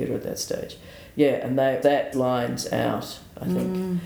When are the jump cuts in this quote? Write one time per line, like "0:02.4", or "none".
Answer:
0:01.8
0:02.1